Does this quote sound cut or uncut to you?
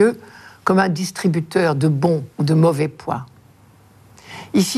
cut